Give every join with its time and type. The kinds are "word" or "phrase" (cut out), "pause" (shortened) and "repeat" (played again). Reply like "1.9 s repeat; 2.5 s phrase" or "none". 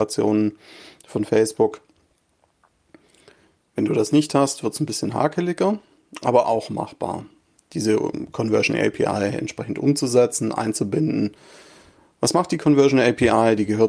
none